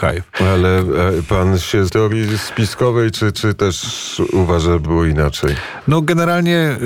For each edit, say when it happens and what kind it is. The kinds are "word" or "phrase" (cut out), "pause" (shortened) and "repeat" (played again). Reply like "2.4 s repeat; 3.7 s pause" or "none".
1.9 s phrase; 3.3 s repeat; 4.8 s word